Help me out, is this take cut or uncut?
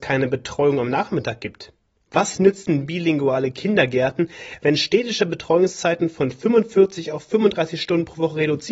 uncut